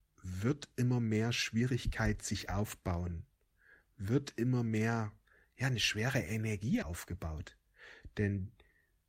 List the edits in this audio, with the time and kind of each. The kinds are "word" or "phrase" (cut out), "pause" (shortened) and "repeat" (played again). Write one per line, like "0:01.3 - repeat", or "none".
0:06.8 - word